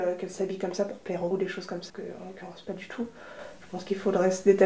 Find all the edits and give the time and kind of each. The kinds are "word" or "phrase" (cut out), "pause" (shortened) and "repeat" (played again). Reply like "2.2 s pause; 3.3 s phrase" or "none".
1.3 s word; 1.9 s word